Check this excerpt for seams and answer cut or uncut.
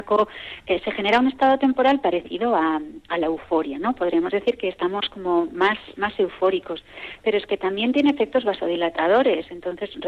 uncut